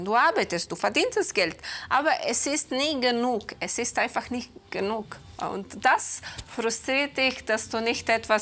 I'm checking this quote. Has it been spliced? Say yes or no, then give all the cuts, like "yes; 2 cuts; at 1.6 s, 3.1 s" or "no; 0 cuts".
no; 0 cuts